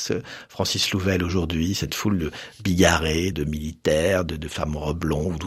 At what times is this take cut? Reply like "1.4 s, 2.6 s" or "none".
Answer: 3.3 s